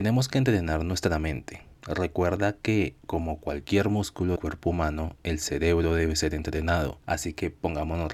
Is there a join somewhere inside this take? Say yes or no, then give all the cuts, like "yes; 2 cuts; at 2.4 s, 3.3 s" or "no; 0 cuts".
yes; 1 cut; at 4.4 s